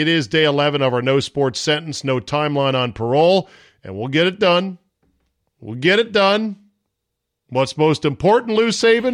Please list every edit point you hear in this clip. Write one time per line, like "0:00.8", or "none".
none